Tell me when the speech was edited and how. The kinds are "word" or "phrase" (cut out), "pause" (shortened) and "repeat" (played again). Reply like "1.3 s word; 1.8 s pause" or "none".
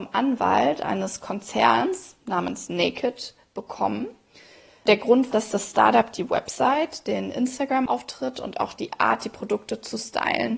5.3 s word